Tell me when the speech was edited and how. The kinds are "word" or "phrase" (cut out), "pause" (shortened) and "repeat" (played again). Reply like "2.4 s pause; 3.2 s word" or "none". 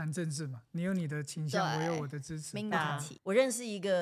2.7 s word